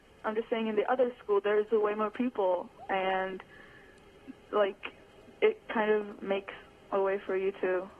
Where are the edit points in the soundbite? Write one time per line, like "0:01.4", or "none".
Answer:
none